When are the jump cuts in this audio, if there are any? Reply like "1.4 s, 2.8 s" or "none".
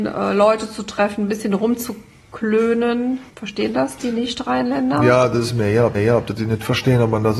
3.3 s, 5.9 s